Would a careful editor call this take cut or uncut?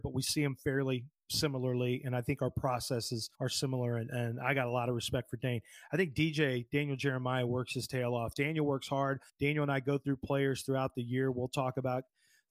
cut